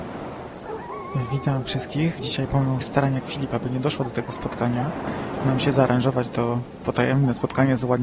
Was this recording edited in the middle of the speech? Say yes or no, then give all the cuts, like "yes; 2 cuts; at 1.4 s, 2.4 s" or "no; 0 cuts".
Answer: yes; 3 cuts; at 2.8 s, 3.2 s, 5.4 s